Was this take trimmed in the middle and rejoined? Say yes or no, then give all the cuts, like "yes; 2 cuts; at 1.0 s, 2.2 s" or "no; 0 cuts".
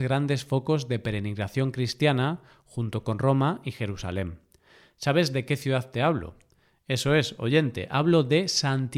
no; 0 cuts